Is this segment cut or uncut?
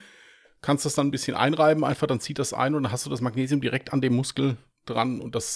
uncut